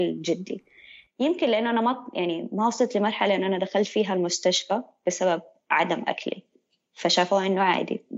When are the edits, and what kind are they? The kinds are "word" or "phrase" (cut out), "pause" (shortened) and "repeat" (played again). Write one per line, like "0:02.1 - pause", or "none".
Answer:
none